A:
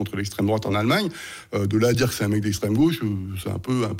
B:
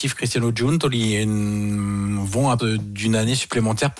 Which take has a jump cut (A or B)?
B